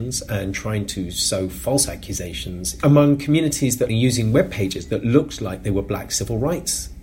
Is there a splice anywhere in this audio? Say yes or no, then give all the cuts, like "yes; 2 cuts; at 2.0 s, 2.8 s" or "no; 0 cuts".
yes; 1 cut; at 3.9 s